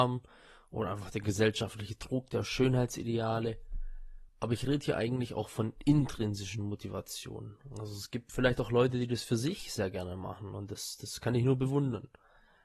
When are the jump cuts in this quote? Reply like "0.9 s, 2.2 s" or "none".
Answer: 4.3 s